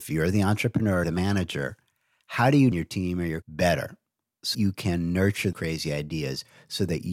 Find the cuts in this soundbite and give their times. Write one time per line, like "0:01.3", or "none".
0:01.0
0:02.7
0:03.4
0:04.5
0:05.5